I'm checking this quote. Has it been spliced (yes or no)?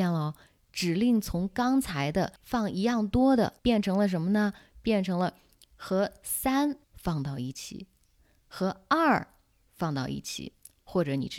yes